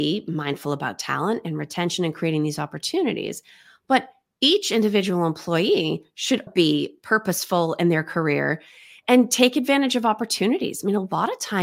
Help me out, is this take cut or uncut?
cut